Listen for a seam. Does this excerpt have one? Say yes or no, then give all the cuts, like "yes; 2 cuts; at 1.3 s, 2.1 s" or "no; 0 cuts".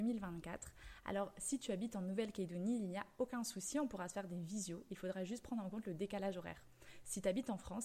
no; 0 cuts